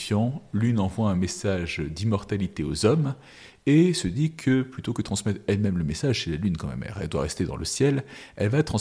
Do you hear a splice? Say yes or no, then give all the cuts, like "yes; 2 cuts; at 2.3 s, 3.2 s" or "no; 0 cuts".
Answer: no; 0 cuts